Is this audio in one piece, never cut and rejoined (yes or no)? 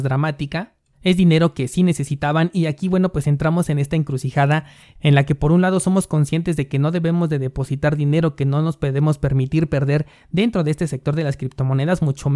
yes